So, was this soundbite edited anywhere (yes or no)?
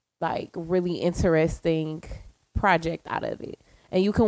no